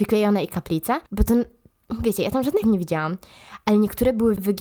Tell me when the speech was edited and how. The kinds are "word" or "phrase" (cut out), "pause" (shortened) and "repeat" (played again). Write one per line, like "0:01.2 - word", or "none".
0:01.1 - pause
0:02.6 - word